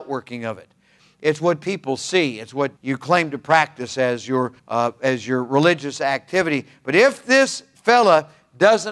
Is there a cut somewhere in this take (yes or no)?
yes